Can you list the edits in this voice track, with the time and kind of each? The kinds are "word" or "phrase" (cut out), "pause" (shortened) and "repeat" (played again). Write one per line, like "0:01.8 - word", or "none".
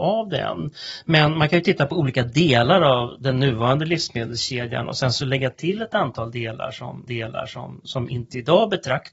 0:07.1 - repeat